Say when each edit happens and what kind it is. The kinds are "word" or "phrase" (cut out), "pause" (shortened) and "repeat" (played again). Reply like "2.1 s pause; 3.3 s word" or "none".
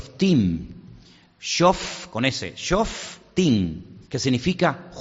4.0 s pause